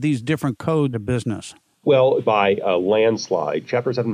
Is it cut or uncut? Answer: cut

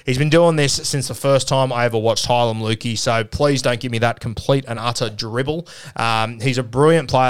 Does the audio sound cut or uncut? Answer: uncut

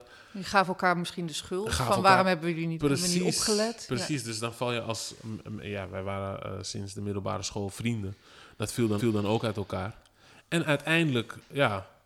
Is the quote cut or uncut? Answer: cut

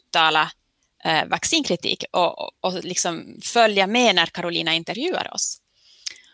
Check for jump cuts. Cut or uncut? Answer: uncut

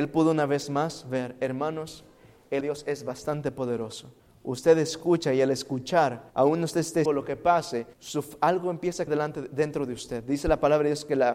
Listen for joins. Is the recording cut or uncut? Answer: cut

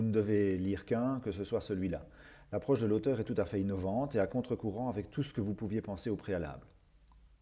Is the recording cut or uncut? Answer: uncut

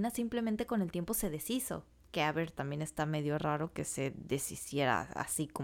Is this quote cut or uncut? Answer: uncut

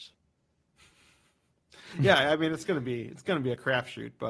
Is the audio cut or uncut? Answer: uncut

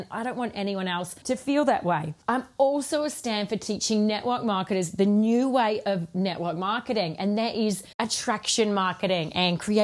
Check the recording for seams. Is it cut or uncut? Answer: cut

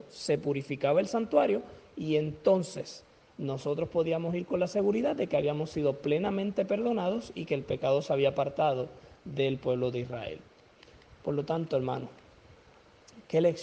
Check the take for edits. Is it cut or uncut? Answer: uncut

